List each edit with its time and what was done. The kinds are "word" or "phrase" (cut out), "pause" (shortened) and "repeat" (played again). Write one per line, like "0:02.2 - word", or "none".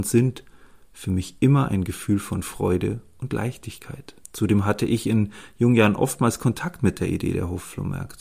0:04.2 - pause